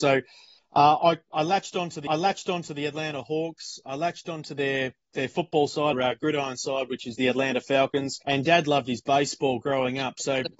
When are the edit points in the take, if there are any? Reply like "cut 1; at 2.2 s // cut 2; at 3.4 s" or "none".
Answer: cut 1; at 2.1 s // cut 2; at 5.9 s // cut 3; at 8.2 s